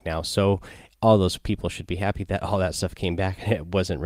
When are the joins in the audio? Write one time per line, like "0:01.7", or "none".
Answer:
none